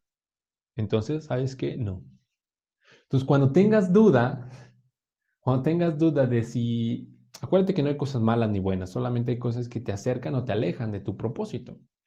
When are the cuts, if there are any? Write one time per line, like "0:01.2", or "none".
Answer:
none

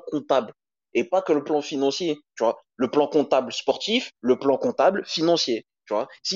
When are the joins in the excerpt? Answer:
0:04.2

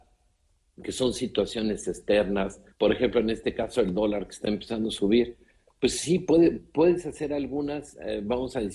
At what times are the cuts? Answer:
0:02.7

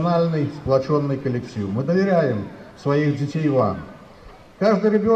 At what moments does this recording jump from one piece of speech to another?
none

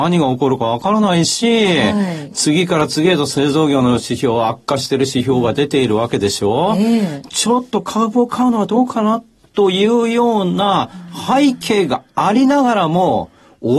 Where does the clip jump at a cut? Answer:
none

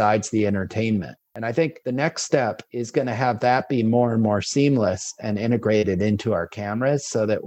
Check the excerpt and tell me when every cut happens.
0:01.3

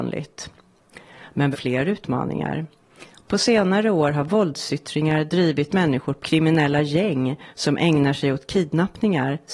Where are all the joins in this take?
0:01.5
0:05.7
0:06.2

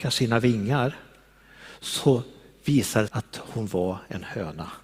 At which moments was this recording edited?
0:03.1

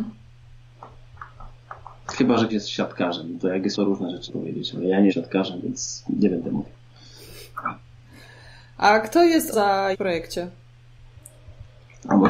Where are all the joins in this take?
0:02.5
0:03.7
0:04.3
0:05.1
0:09.5
0:09.9

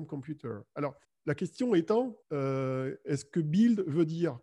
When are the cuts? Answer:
0:01.0
0:02.2

